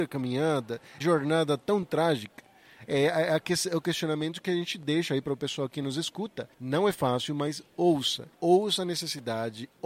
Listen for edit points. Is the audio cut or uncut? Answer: cut